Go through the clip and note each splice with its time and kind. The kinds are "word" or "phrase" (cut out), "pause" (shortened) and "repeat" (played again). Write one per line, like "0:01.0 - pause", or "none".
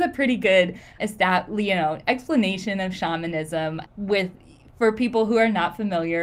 0:01.0 - word
0:03.9 - word